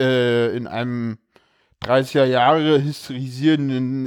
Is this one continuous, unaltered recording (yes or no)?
yes